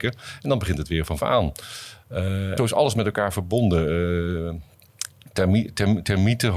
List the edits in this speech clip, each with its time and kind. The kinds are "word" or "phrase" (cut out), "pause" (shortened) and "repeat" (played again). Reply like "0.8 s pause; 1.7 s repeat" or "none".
1.2 s word; 2.6 s phrase

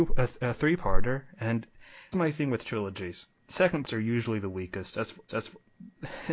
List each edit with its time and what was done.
2.1 s word; 3.8 s word; 5.3 s repeat

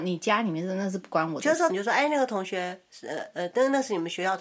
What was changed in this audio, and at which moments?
1.7 s phrase

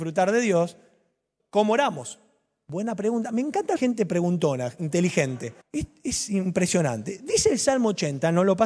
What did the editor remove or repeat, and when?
1.4 s word; 3.8 s phrase; 5.6 s pause

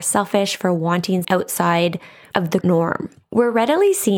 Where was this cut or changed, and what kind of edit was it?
1.2 s word; 2.6 s word

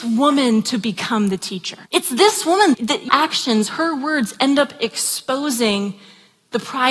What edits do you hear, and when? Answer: 1.9 s pause; 2.7 s word; 3.1 s phrase

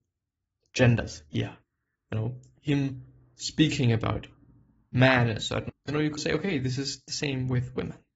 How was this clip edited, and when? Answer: 5.7 s word; 6.2 s word

